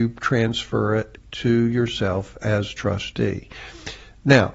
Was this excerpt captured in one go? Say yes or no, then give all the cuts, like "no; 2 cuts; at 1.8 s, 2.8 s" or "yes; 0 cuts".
no; 1 cut; at 1.2 s